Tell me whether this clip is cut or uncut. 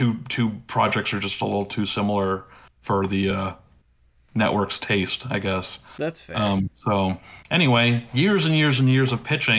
uncut